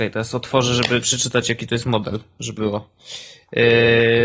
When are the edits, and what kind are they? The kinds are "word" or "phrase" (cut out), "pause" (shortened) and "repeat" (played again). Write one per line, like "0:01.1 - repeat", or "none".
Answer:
0:01.0 - word
0:02.6 - word